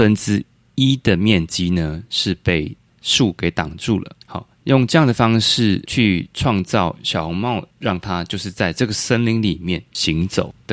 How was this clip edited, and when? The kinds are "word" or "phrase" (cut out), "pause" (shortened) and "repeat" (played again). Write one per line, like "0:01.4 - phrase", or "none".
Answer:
0:04.2 - pause
0:07.7 - pause